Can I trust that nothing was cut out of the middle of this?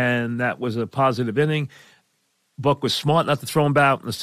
yes; 0 cuts

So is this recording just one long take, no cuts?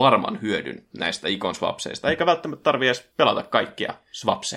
no; 1 cut; at 3.1 s

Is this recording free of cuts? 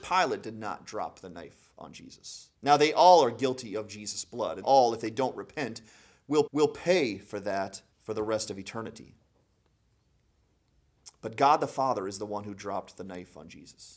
no; 4 cuts; at 2.5 s, 4.6 s, 6.5 s, 7.9 s

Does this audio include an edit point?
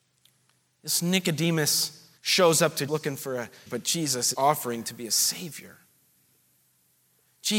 yes; 4 cuts; at 2.2 s, 2.9 s, 3.7 s, 4.3 s

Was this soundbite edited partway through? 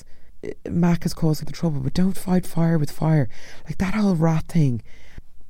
yes; 1 cut; at 1.4 s

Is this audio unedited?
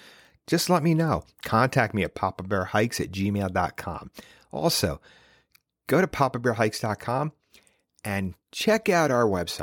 yes; 0 cuts

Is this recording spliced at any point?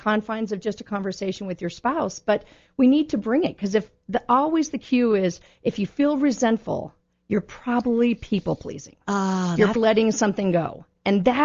yes; 1 cut; at 9.8 s

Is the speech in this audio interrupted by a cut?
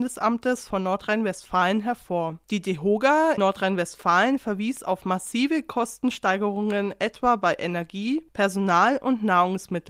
yes; 1 cut; at 3.4 s

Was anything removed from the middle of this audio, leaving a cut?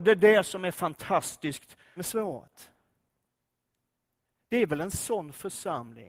yes; 1 cut; at 2.0 s

